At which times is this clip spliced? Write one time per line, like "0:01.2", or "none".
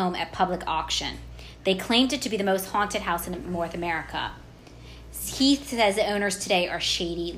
none